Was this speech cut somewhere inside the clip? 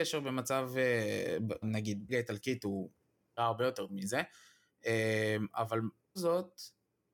yes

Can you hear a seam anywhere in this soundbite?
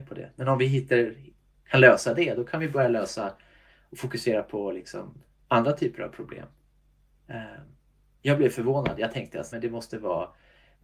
yes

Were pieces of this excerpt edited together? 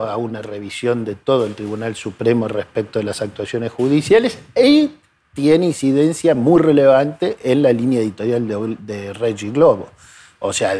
no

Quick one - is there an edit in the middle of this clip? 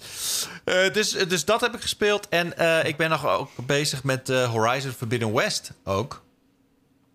no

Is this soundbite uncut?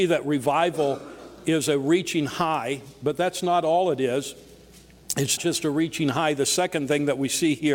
no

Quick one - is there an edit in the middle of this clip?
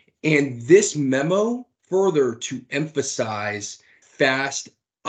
yes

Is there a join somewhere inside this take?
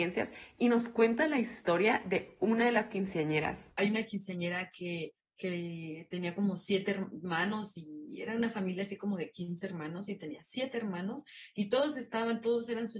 yes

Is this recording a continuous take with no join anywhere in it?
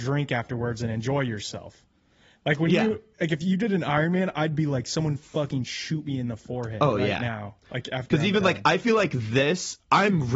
yes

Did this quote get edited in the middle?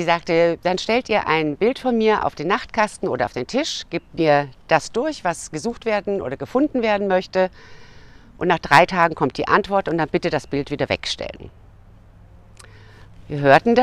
no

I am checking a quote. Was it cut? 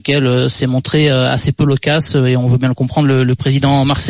no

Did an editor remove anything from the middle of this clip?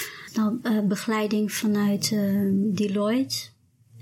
no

